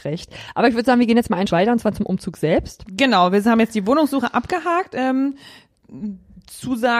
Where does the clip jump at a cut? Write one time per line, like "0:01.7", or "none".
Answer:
0:01.5